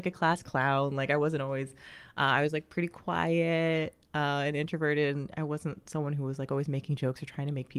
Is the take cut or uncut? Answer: uncut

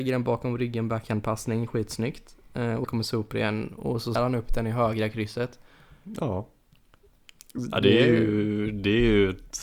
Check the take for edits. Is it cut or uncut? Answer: cut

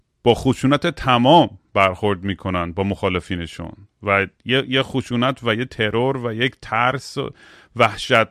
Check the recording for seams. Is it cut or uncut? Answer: uncut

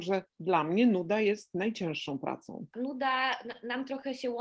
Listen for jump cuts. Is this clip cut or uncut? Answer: cut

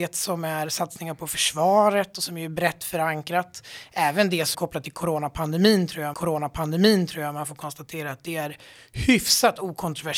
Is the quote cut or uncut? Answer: cut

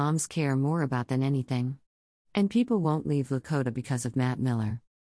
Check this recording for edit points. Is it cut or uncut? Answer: uncut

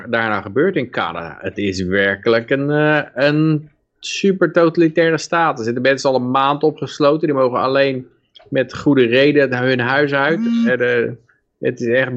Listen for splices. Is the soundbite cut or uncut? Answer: uncut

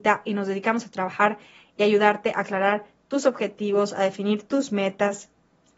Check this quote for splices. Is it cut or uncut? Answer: uncut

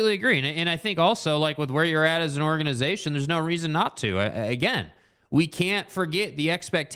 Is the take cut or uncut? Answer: uncut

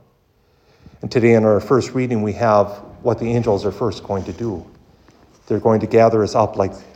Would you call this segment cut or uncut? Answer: uncut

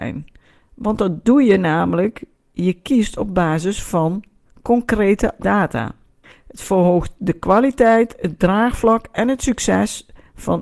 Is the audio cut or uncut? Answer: cut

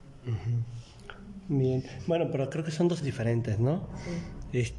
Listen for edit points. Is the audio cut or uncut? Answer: cut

